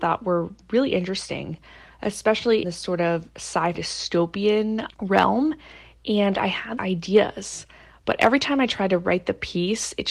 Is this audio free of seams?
no; 4 cuts; at 2.6 s, 3.7 s, 4.9 s, 6.8 s

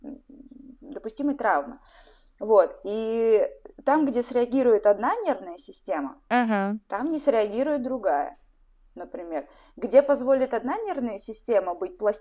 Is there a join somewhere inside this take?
no; 0 cuts

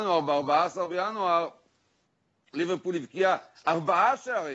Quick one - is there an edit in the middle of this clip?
no; 0 cuts

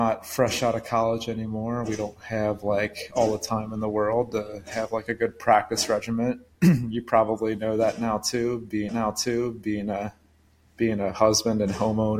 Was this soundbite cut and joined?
yes; 1 cut; at 8.9 s

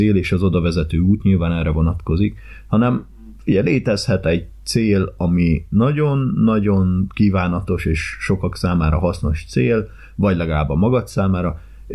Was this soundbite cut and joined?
no; 0 cuts

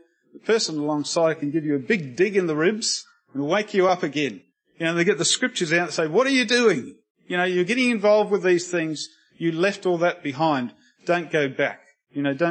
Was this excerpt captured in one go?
yes; 0 cuts

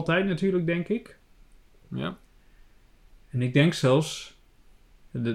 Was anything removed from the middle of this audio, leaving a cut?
no; 0 cuts

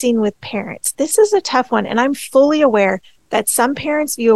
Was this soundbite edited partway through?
no; 0 cuts

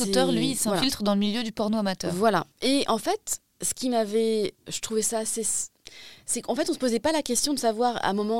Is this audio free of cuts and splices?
no; 3 cuts; at 2.5 s, 3.5 s, 4.6 s

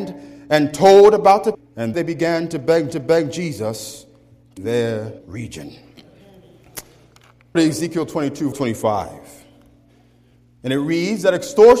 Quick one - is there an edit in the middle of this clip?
yes; 7 cuts; at 1.5 s, 1.9 s, 2.9 s, 4.6 s, 5.2 s, 7.5 s, 8.5 s

